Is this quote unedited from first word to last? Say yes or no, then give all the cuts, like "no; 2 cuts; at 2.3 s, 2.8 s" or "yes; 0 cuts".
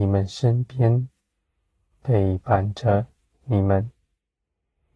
yes; 0 cuts